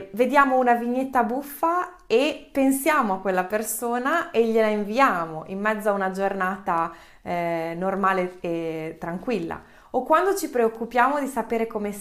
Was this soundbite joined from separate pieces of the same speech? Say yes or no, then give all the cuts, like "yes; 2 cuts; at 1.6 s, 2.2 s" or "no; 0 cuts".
no; 0 cuts